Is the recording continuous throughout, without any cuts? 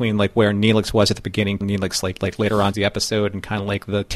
no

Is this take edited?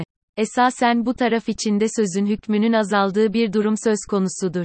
no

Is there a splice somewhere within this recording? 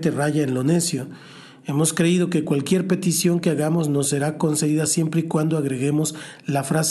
no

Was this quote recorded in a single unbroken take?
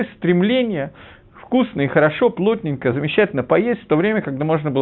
yes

